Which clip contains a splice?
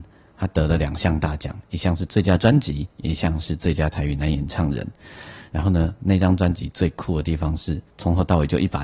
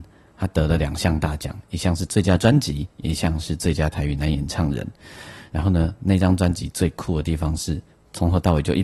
first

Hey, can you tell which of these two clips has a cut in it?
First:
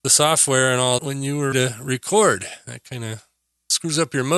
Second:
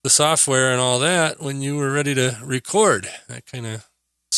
first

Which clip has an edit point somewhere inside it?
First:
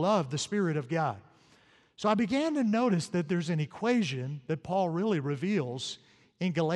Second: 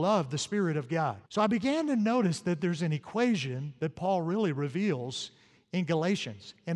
second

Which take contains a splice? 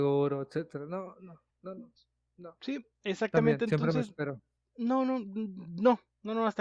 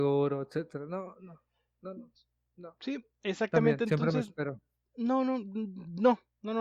first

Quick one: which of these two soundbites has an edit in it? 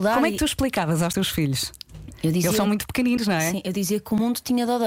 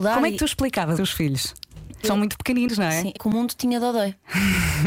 second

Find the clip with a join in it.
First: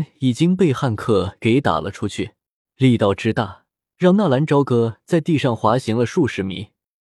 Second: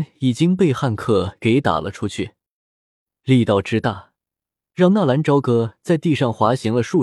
first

